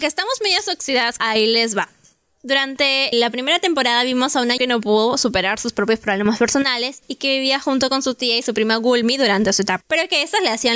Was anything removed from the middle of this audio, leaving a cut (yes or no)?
yes